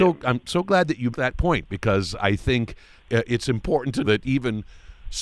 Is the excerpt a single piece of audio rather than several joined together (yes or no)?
no